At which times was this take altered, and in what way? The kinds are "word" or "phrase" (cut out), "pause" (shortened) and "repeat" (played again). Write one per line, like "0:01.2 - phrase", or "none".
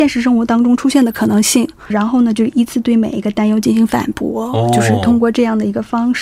0:01.9 - phrase